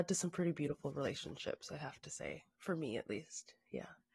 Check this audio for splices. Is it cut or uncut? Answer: uncut